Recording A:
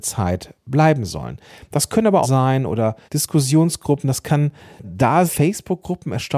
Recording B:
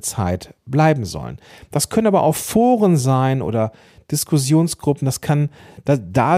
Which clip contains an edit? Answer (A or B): A